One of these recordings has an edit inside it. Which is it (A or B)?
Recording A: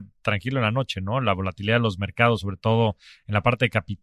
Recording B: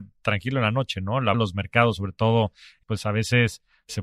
B